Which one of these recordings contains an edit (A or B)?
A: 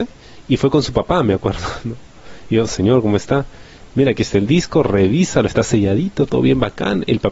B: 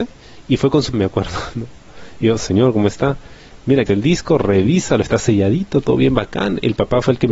B